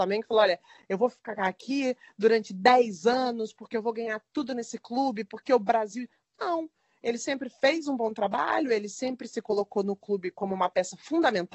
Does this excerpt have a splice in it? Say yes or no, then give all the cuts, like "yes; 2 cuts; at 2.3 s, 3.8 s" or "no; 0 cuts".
no; 0 cuts